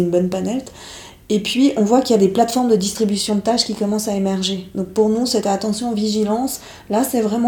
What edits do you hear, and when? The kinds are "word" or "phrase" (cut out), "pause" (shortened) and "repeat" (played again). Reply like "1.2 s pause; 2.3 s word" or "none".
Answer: none